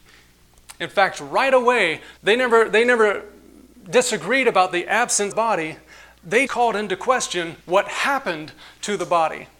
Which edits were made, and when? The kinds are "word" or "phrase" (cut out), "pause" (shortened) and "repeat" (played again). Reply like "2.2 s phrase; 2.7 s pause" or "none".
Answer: 2.2 s pause; 5.3 s phrase; 6.5 s word; 7.6 s pause